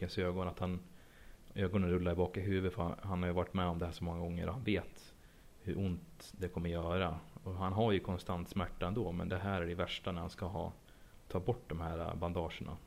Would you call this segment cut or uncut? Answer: uncut